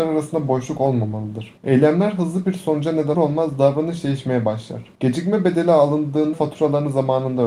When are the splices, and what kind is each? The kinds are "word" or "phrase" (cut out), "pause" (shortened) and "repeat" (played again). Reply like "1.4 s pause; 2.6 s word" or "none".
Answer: 1.6 s pause; 3.1 s word; 4.9 s pause; 6.3 s word